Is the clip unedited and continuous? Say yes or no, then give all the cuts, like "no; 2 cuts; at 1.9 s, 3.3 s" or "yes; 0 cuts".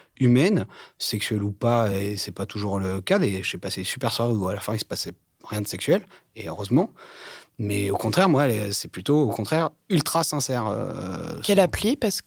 yes; 0 cuts